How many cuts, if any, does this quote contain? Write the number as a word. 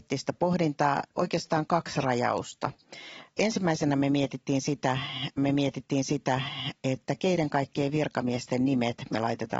two